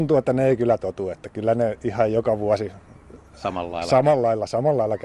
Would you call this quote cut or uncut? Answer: uncut